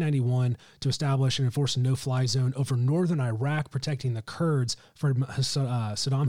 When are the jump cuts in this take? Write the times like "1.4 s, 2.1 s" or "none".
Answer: none